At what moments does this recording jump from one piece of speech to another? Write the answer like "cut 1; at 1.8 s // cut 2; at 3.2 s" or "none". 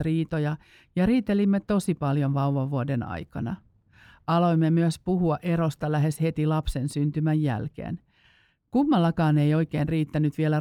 none